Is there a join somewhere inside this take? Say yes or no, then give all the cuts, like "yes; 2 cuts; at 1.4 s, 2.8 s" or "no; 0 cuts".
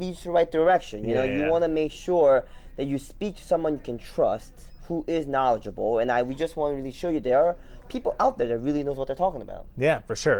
no; 0 cuts